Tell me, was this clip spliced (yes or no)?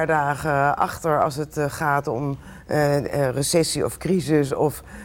no